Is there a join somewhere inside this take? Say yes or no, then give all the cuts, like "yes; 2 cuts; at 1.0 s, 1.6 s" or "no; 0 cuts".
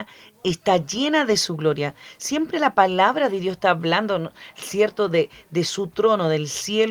no; 0 cuts